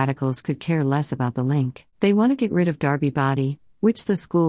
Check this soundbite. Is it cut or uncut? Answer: cut